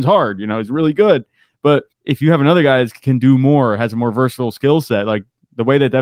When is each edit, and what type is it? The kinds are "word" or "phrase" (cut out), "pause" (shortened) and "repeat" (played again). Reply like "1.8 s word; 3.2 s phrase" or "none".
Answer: 1.9 s pause